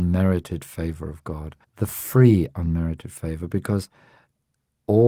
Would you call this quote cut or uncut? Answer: cut